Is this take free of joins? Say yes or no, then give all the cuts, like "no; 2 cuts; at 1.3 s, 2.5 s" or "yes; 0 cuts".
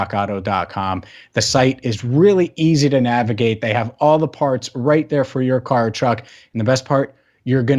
yes; 0 cuts